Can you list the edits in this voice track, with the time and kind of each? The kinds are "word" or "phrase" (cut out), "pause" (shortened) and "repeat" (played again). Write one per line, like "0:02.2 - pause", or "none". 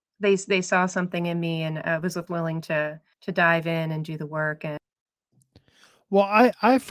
0:02.3 - word
0:03.1 - pause

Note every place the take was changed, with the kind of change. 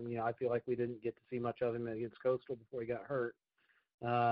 none

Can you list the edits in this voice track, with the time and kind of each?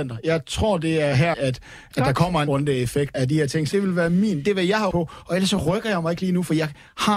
0:01.3 - word
0:02.5 - word
0:03.1 - word
0:03.7 - word
0:04.4 - word
0:04.9 - word

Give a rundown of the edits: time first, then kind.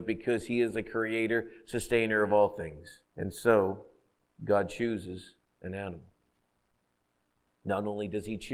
0:03.1 - pause

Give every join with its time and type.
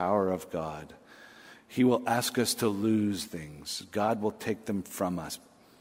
0:03.3 - word

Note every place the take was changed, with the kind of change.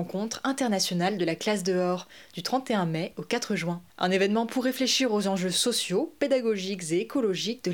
0:03.9 - pause

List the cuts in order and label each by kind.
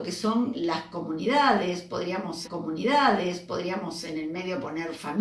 0:02.4 - repeat

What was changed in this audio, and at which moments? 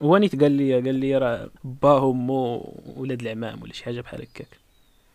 0:01.6 - pause

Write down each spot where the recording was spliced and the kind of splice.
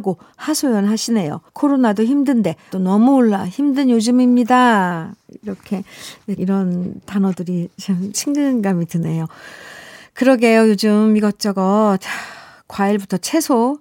0:01.5 - pause
0:02.7 - word
0:06.4 - word
0:08.1 - word

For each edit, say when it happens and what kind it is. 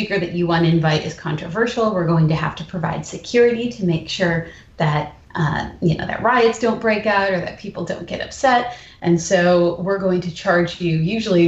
0:05.2 - pause

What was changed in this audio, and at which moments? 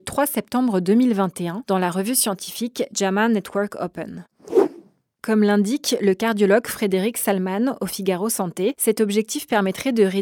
none

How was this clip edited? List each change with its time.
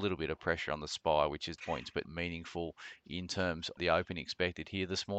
0:01.6 - phrase
0:02.0 - word
0:03.8 - word

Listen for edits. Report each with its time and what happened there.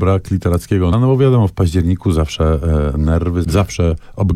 0:00.9 - word

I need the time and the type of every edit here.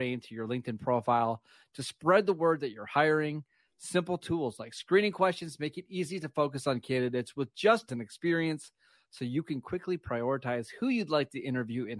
0:07.9 - phrase

